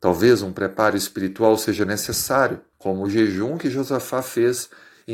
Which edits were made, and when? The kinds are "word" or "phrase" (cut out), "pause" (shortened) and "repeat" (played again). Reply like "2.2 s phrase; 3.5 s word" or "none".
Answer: 2.7 s pause